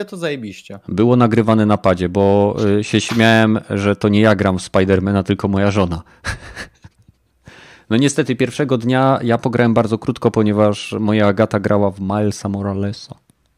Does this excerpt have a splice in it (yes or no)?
no